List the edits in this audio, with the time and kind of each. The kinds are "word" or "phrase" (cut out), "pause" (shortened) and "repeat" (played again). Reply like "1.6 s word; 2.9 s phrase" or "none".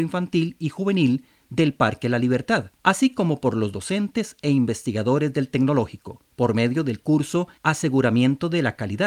2.8 s pause; 6.3 s pause; 7.6 s pause